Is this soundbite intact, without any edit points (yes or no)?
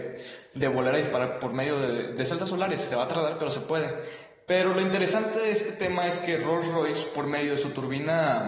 yes